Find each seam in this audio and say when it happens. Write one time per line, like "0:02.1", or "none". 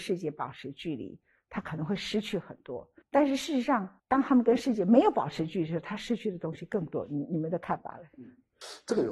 0:03.0
0:04.0